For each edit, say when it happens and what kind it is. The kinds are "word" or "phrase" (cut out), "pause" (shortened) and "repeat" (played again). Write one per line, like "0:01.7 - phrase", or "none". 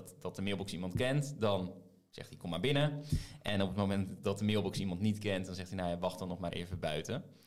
0:06.5 - word